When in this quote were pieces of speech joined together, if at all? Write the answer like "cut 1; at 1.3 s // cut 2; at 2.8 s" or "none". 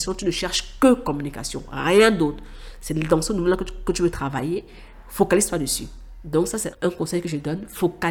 cut 1; at 6.7 s